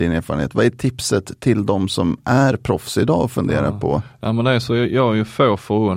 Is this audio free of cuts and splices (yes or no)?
yes